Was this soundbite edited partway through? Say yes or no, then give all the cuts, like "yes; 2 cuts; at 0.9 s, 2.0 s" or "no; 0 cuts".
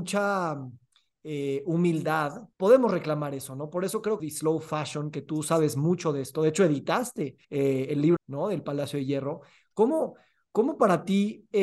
yes; 4 cuts; at 2.5 s, 4.2 s, 7.4 s, 8.2 s